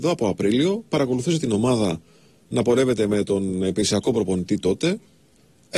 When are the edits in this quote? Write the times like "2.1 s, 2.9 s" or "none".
none